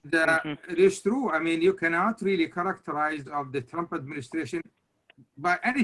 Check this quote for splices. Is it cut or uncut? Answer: cut